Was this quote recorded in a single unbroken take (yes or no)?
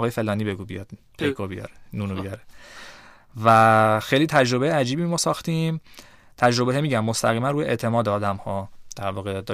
yes